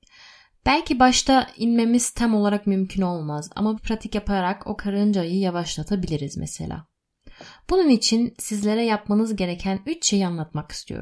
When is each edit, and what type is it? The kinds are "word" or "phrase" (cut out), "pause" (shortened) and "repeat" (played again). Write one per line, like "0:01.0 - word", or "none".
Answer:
0:03.8 - word